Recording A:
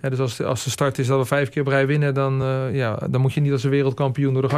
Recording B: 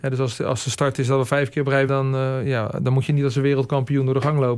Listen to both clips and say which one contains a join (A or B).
B